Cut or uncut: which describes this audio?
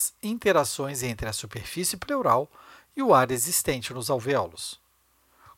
uncut